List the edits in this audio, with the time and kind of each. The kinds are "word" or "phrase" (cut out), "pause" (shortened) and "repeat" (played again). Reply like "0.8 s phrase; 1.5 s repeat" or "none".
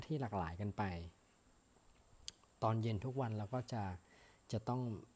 none